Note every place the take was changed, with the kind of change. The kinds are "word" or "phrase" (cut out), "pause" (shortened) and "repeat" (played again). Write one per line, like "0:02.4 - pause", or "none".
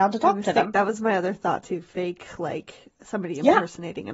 none